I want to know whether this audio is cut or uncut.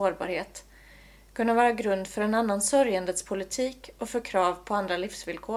uncut